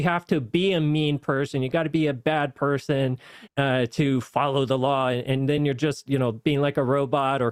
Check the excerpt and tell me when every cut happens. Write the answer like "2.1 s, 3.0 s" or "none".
none